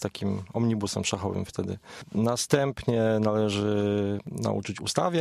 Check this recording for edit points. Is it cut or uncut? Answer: uncut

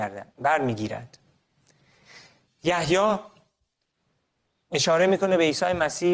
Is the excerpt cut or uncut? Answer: uncut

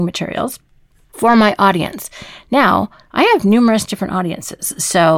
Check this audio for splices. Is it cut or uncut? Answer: uncut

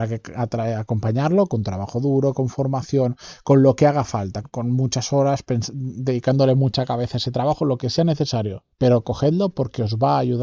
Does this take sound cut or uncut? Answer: cut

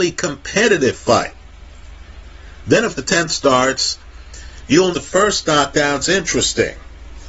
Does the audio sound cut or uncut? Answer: cut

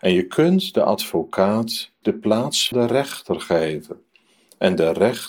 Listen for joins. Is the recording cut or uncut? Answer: cut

